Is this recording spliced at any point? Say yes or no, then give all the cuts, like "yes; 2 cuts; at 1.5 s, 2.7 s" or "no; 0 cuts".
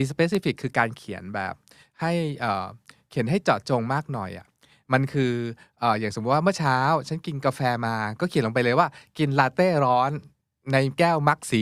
no; 0 cuts